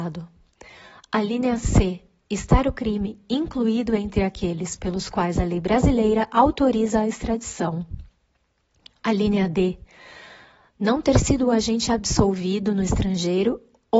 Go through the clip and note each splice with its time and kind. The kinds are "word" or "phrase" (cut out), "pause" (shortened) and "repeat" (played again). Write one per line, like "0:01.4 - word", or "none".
none